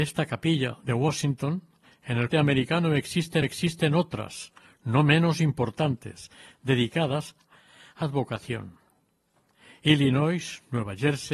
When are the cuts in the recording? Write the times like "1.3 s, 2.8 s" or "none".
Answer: 2.3 s, 3.4 s, 8.0 s